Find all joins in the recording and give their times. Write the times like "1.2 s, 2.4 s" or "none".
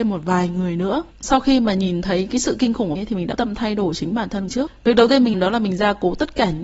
1.1 s, 3.0 s, 3.4 s, 4.5 s, 5.3 s